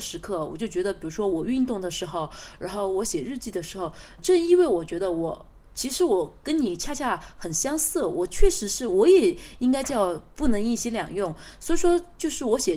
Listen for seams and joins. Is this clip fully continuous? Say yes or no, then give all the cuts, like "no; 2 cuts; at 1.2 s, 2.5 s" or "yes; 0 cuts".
no; 1 cut; at 4.2 s